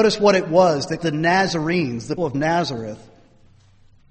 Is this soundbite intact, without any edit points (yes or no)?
no